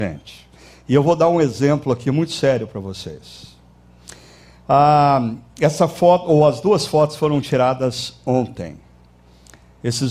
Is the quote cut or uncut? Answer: uncut